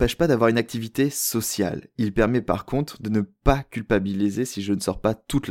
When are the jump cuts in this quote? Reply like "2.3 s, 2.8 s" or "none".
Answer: none